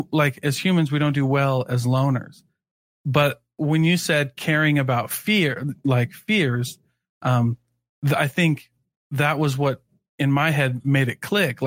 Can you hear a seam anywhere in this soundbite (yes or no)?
no